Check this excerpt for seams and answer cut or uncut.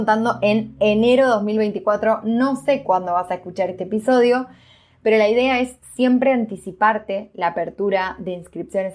uncut